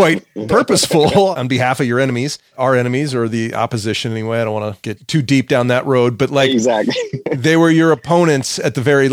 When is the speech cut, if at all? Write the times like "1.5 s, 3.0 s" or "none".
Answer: 2.5 s